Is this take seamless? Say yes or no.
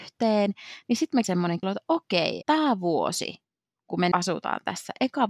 no